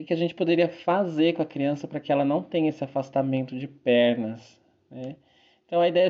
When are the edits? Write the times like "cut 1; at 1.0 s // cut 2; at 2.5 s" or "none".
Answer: none